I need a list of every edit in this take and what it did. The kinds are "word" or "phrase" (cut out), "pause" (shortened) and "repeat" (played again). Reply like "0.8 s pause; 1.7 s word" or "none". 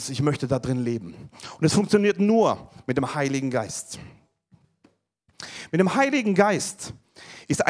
none